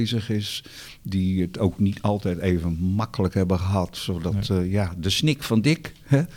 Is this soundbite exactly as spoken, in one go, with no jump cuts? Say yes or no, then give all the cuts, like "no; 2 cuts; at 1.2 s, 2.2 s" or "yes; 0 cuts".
yes; 0 cuts